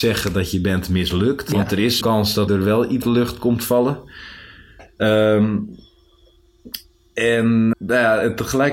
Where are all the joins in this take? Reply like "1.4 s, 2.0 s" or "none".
2.0 s, 2.5 s, 3.0 s, 7.7 s